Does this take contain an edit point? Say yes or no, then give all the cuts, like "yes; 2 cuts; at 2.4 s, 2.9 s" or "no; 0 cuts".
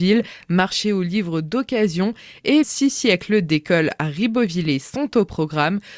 yes; 1 cut; at 2.6 s